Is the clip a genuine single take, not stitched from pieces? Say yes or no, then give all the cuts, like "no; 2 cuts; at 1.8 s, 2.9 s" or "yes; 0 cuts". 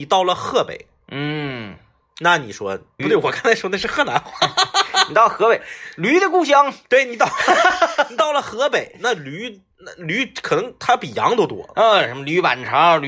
no; 2 cuts; at 3.0 s, 9.7 s